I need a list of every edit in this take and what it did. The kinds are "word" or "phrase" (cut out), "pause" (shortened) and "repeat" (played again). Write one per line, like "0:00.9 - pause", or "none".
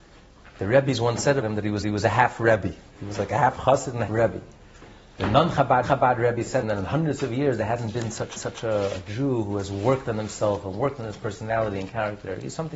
0:01.4 - word
0:01.8 - repeat
0:04.1 - word
0:05.8 - repeat
0:06.6 - phrase
0:08.4 - repeat